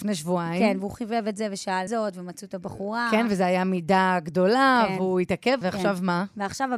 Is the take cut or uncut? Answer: cut